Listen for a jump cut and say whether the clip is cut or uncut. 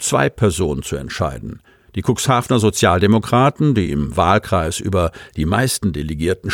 uncut